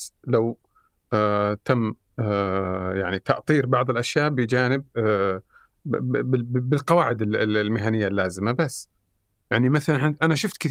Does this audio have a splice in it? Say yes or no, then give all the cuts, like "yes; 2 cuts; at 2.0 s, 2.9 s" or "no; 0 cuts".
no; 0 cuts